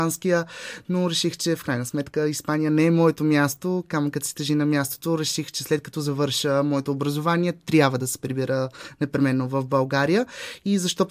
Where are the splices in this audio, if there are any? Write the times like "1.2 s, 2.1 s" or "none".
none